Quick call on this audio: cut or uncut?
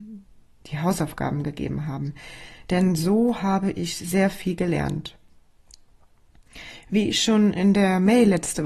uncut